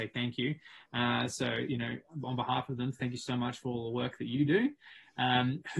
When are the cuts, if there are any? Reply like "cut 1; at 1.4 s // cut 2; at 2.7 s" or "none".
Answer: none